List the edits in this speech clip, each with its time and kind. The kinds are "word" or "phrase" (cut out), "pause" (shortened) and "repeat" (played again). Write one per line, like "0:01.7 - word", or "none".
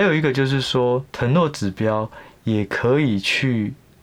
0:01.1 - pause

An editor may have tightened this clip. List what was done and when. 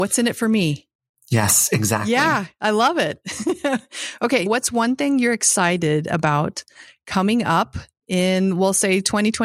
0:04.5 - word

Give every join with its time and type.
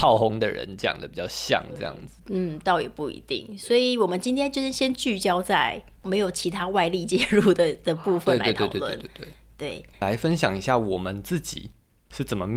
0:09.9 - pause

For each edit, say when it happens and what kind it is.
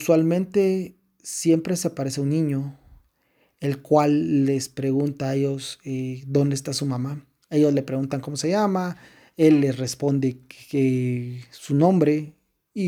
0:07.4 - pause

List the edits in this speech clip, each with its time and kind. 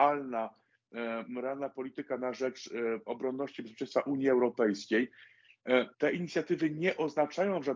0:05.9 - pause

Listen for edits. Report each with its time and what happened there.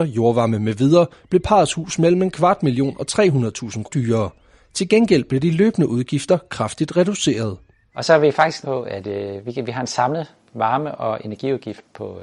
0:03.8 - word
0:08.6 - word

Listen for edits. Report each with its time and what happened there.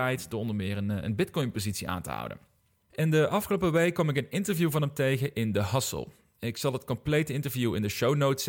none

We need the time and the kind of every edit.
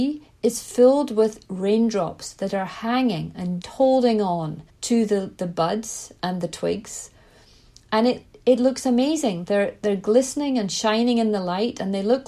0:03.6 - word
0:04.7 - pause

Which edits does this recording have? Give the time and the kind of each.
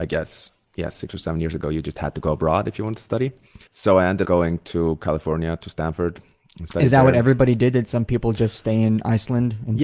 0:03.7 - pause
0:04.2 - word

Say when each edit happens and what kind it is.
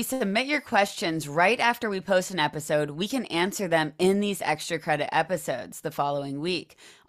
none

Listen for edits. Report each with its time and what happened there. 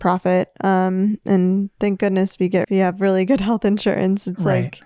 0:02.6 - word

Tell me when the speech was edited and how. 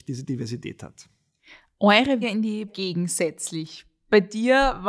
0:02.2 - word
0:02.7 - phrase

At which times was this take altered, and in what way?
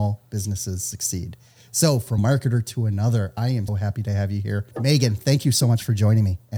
0:02.2 - phrase
0:03.7 - word
0:04.7 - pause

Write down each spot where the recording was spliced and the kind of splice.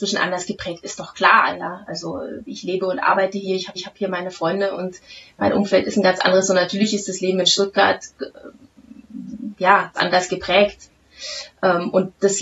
0:03.8 - repeat
0:10.0 - word

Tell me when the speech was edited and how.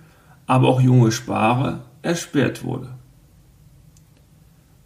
none

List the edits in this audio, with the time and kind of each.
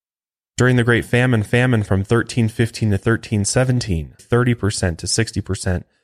0:01.5 - repeat
0:04.2 - word

